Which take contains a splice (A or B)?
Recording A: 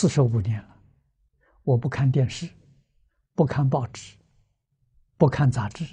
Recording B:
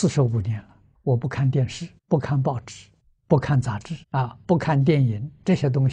B